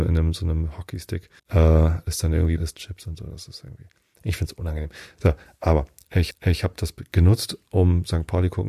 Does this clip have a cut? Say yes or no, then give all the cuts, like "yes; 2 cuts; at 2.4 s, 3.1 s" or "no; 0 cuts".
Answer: yes; 3 cuts; at 1.4 s, 2.6 s, 6.3 s